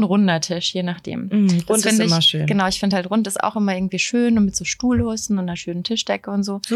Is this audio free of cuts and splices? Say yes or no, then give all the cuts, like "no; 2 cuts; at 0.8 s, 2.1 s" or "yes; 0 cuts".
yes; 0 cuts